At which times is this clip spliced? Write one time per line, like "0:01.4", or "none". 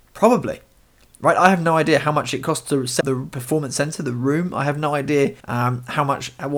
0:03.0
0:05.4